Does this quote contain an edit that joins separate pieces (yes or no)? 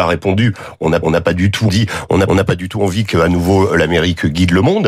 yes